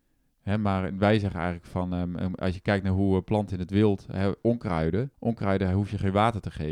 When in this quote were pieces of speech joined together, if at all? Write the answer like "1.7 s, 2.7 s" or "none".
5.1 s